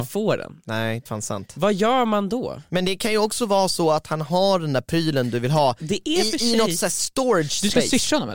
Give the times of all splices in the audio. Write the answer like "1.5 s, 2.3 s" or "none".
1.1 s

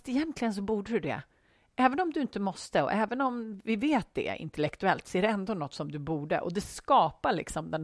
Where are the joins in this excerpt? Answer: none

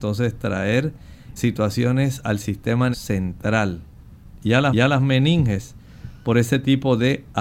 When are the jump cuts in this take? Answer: 1.4 s, 2.9 s, 4.7 s

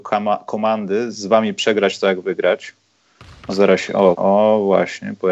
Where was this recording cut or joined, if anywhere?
3.5 s, 4.1 s

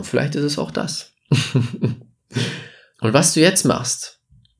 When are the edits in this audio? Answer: 2.9 s

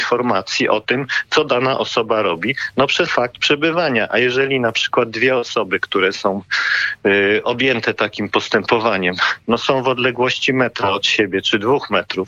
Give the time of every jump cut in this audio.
3.1 s

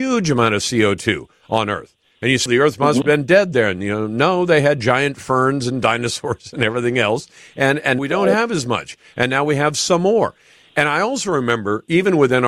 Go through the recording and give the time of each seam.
2.5 s, 8.0 s

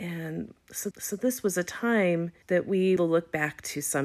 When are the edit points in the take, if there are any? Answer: 0.9 s, 2.4 s, 3.0 s

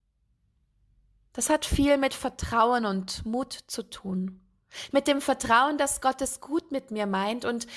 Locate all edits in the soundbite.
none

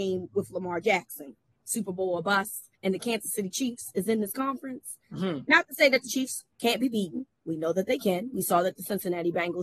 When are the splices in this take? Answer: 1.5 s, 2.7 s, 5.0 s, 6.5 s

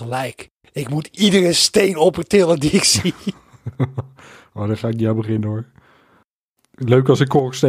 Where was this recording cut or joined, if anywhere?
none

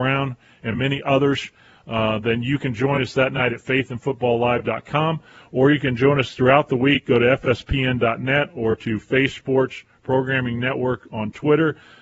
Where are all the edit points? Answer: none

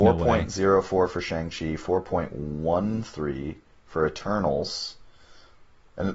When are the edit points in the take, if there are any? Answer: none

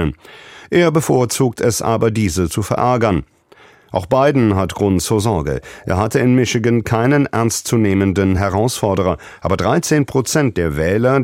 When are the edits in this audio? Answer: none

